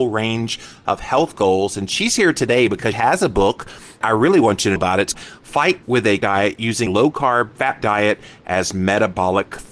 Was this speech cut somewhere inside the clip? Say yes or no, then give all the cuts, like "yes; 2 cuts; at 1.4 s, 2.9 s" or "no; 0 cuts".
yes; 8 cuts; at 2.9 s, 4.0 s, 4.8 s, 5.1 s, 5.8 s, 6.2 s, 6.9 s, 7.8 s